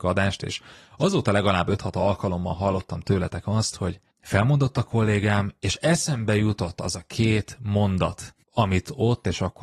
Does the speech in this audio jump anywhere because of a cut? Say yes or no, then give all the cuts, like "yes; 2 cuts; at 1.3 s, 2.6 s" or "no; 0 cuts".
yes; 1 cut; at 8.4 s